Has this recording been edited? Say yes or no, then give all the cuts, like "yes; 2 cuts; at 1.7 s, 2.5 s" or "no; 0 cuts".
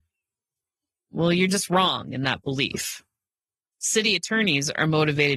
no; 0 cuts